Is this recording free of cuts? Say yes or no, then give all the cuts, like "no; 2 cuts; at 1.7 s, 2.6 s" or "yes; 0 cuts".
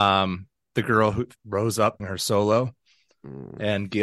no; 2 cuts; at 1.4 s, 2.0 s